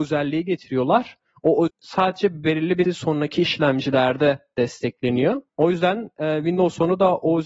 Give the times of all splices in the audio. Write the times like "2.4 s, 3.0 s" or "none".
1.7 s, 2.8 s, 5.5 s